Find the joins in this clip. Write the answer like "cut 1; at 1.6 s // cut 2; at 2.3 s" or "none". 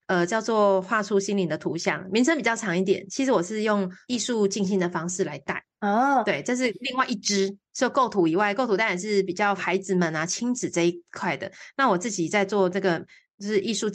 cut 1; at 9.6 s